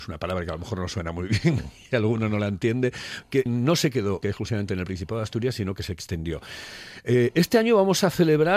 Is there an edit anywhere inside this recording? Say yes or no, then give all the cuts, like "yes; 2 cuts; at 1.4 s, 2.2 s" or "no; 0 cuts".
yes; 2 cuts; at 3.5 s, 4.2 s